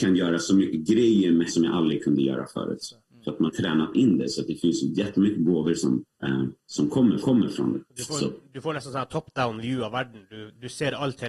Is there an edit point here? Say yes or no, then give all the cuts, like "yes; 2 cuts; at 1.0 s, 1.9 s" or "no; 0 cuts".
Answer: yes; 6 cuts; at 1.5 s, 3.5 s, 6.1 s, 6.6 s, 7.2 s, 7.9 s